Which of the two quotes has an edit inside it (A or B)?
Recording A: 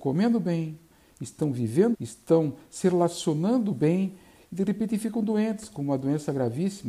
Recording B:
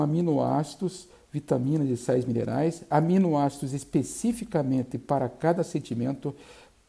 A